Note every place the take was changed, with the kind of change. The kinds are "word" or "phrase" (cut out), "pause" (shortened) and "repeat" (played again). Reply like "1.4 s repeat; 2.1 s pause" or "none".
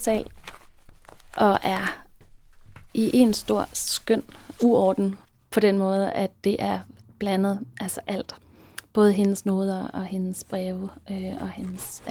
none